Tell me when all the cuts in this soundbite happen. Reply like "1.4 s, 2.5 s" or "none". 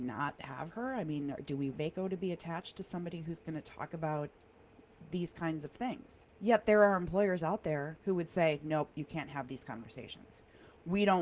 1.7 s, 6.3 s, 8.0 s